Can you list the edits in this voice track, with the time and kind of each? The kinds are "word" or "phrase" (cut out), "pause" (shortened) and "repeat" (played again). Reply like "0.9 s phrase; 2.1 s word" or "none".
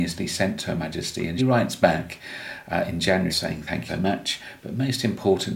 1.4 s word; 3.3 s word; 3.9 s word